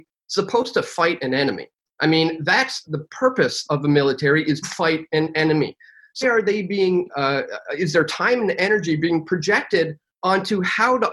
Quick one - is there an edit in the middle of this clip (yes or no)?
yes